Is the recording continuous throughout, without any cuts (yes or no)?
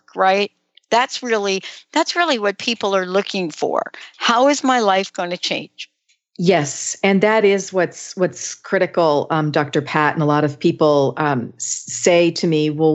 yes